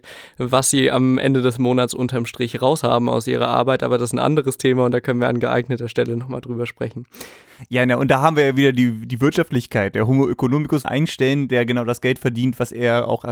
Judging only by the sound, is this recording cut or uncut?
cut